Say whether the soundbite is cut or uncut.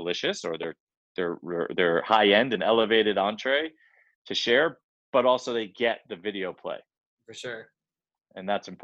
uncut